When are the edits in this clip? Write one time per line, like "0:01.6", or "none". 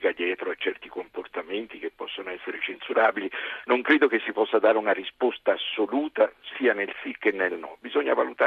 none